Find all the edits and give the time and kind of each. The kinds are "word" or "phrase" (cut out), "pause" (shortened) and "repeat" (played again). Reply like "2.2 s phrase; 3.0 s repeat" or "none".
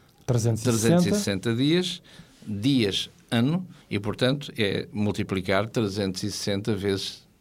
3.8 s pause

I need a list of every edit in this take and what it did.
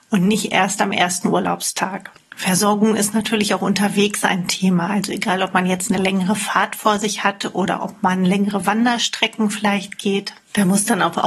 none

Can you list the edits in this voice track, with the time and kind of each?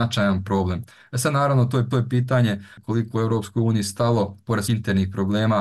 1.9 s repeat; 4.7 s word

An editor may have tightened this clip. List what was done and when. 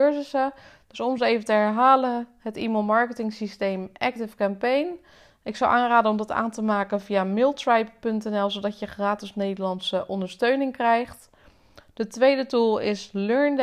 none

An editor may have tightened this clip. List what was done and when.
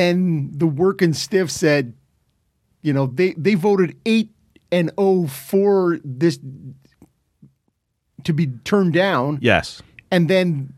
none

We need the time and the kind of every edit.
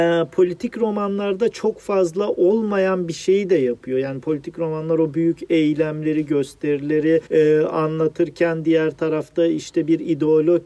7.3 s pause

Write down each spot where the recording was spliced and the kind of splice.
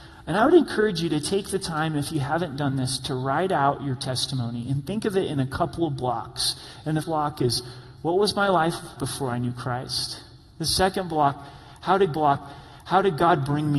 7.0 s word; 9.0 s word; 12.1 s repeat

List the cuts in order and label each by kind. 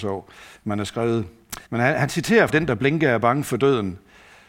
1.6 s pause; 2.5 s word

